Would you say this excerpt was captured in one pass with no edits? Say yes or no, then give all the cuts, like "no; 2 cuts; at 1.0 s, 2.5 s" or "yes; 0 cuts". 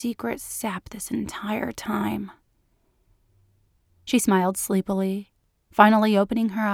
yes; 0 cuts